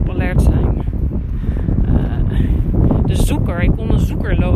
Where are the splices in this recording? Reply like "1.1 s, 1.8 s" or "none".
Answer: none